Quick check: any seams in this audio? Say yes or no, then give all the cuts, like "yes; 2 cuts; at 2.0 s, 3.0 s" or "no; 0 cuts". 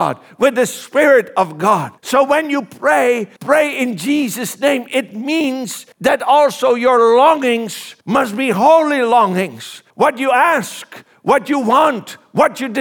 yes; 5 cuts; at 2.0 s, 3.4 s, 5.9 s, 8.0 s, 9.9 s